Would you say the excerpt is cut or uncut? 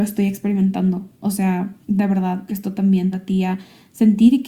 cut